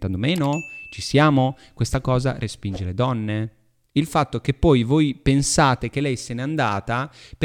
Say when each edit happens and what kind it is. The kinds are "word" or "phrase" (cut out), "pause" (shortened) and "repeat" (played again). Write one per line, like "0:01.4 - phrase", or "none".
none